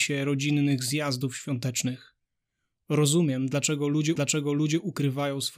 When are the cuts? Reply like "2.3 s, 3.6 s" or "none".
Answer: 4.2 s